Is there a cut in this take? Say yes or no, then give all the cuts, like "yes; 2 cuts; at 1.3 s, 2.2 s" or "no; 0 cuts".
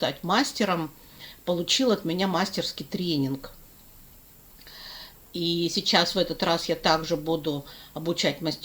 no; 0 cuts